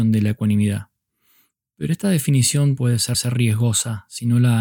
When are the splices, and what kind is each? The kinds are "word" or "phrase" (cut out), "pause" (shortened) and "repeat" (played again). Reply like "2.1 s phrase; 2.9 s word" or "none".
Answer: 2.8 s word; 3.1 s repeat